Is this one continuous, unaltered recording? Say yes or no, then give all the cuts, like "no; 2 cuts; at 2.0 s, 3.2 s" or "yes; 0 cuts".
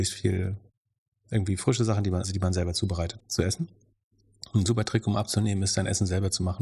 no; 2 cuts; at 2.2 s, 3.2 s